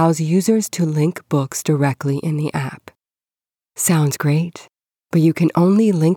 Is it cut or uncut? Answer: uncut